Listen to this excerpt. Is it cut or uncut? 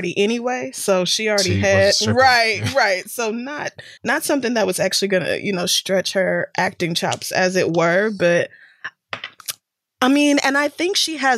cut